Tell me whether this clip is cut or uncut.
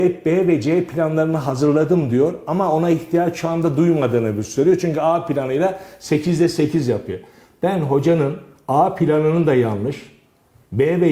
uncut